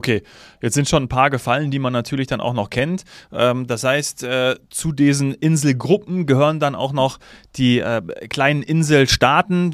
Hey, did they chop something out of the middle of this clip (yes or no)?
no